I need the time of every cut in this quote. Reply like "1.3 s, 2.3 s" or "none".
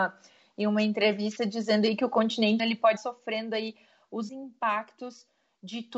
2.6 s, 3.0 s, 4.3 s